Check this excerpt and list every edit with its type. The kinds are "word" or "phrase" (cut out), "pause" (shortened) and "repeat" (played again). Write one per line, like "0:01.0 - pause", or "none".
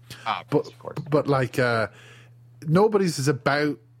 none